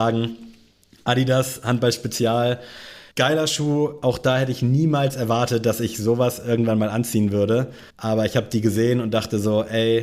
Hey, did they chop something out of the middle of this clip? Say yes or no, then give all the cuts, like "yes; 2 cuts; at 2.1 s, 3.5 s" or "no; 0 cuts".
yes; 2 cuts; at 3.1 s, 7.9 s